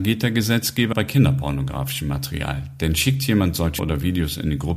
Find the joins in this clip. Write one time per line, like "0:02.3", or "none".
0:00.9
0:03.8